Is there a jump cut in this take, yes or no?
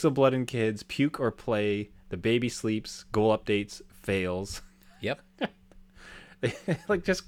no